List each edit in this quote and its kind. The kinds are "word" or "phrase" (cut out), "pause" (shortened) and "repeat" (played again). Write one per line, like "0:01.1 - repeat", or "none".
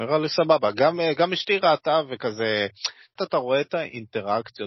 0:03.2 - phrase